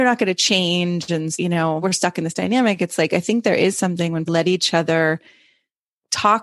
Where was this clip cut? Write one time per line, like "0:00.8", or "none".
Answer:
0:01.3
0:01.8
0:04.3